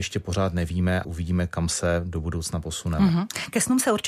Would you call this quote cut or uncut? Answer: cut